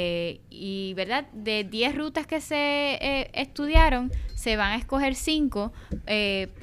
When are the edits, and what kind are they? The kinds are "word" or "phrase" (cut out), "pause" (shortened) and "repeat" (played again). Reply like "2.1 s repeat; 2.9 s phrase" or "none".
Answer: none